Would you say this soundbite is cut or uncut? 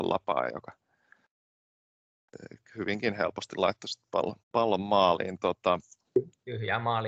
cut